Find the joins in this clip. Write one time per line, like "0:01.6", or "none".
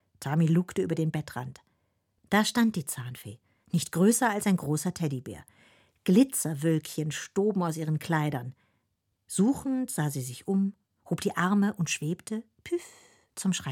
none